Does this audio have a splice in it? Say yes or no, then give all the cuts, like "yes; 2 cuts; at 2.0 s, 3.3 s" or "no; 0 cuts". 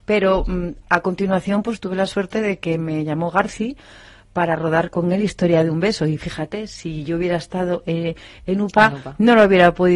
no; 0 cuts